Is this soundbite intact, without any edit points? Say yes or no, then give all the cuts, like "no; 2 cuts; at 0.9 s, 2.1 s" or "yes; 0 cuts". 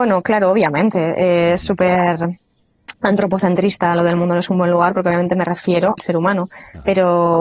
no; 1 cut; at 6.0 s